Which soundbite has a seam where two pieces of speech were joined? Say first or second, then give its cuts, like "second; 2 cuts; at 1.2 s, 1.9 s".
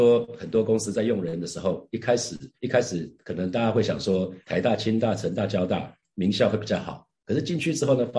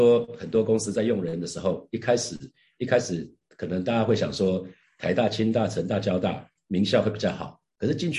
first; 3 cuts; at 2.5 s, 3.2 s, 4.4 s